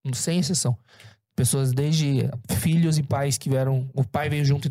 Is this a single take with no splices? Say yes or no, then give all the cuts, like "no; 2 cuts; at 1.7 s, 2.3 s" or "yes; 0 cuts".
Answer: yes; 0 cuts